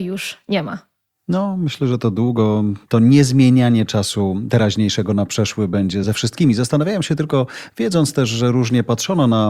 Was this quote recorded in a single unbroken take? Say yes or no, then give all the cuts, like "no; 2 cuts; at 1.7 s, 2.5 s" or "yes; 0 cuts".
yes; 0 cuts